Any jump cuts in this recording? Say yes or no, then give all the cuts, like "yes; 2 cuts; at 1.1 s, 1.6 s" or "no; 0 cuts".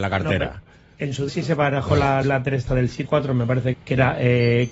yes; 5 cuts; at 1.3 s, 2.2 s, 2.7 s, 3.1 s, 3.7 s